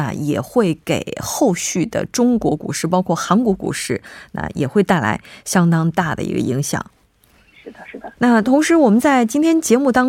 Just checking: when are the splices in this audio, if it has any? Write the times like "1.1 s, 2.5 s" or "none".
8.2 s